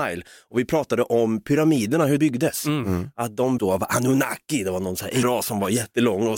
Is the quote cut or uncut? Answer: cut